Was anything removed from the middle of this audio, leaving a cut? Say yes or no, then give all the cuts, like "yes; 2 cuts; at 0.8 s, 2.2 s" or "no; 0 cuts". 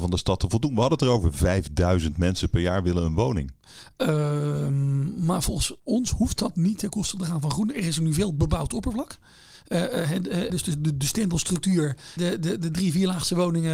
yes; 3 cuts; at 5.8 s, 10.5 s, 12.2 s